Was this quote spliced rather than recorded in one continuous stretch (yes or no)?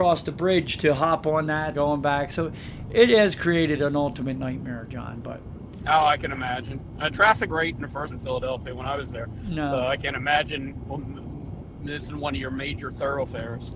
yes